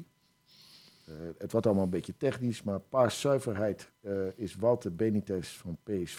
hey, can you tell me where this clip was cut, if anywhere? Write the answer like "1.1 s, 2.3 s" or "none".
3.9 s